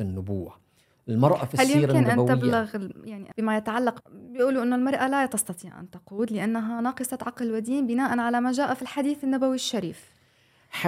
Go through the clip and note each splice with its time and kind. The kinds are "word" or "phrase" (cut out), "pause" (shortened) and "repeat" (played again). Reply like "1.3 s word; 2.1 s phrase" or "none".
4.0 s word